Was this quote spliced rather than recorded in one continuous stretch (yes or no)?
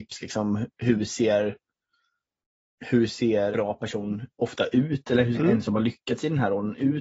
yes